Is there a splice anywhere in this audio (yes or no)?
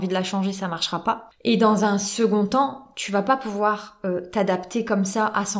no